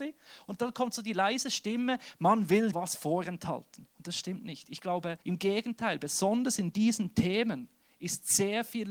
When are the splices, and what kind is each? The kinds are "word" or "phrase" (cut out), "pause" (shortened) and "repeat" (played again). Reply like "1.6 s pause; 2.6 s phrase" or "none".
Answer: 2.7 s word; 3.9 s pause; 5.2 s pause